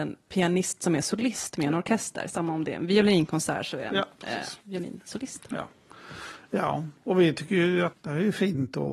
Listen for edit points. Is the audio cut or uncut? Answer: cut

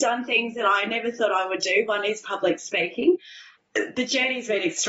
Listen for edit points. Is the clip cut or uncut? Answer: uncut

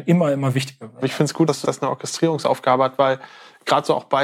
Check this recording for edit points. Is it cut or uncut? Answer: cut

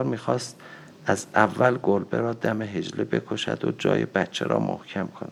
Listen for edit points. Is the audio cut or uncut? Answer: uncut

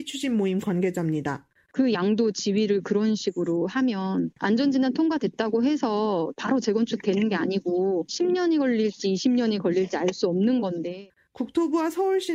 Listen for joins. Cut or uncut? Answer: uncut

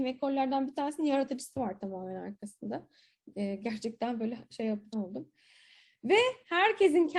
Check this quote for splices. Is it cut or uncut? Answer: cut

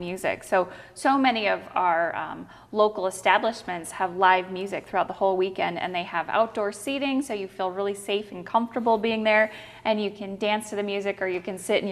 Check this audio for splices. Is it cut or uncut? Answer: uncut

